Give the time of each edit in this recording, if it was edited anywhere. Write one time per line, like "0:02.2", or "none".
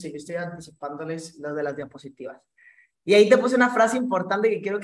none